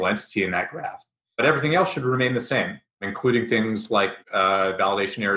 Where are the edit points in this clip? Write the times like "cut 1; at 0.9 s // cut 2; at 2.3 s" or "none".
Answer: none